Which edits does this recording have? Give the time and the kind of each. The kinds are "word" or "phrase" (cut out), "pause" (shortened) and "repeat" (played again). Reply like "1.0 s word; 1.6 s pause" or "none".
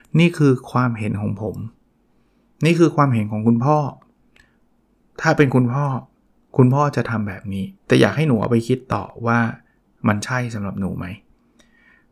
7.8 s pause